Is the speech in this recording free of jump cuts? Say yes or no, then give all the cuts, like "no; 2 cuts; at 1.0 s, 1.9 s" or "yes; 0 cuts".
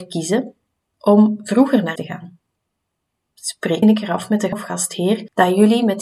no; 3 cuts; at 2.0 s, 3.8 s, 4.5 s